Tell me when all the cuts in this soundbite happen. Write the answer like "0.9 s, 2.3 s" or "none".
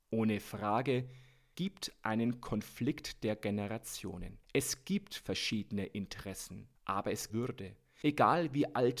1.5 s, 4.4 s, 6.8 s, 7.3 s